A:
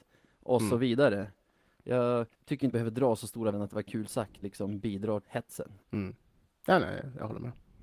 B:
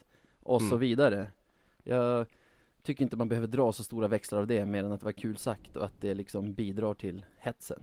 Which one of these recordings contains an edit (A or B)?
A